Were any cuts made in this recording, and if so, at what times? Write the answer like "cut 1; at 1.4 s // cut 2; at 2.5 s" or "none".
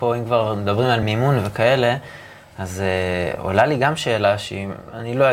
none